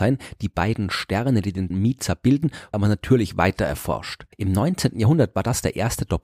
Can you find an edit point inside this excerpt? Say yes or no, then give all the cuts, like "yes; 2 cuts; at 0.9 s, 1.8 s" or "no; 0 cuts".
yes; 3 cuts; at 1.7 s, 2.7 s, 4.3 s